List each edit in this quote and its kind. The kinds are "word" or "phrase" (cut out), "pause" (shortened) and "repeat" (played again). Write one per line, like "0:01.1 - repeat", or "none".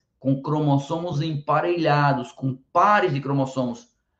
none